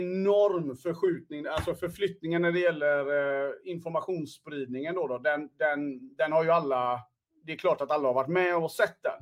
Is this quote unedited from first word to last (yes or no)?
yes